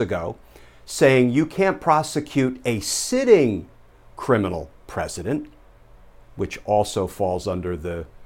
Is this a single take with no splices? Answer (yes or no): yes